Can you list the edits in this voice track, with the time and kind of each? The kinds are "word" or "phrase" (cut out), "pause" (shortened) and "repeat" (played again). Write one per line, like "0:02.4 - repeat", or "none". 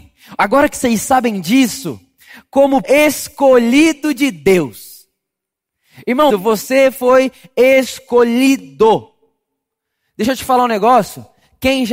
0:02.8 - word
0:06.3 - word